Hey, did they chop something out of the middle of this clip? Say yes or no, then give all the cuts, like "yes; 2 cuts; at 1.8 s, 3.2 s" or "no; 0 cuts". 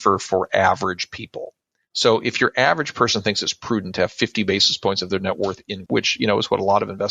yes; 1 cut; at 5.9 s